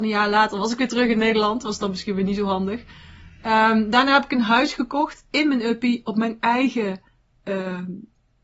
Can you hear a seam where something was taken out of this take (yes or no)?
no